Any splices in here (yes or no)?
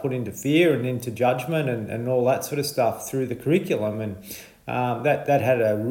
no